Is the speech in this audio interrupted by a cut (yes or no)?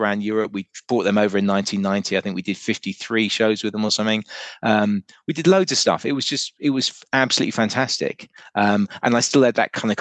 no